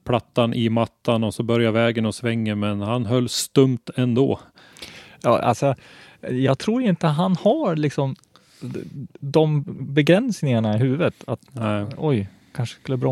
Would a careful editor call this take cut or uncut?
uncut